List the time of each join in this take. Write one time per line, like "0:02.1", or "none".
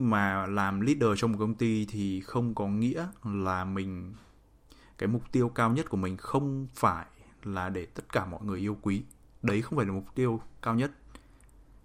none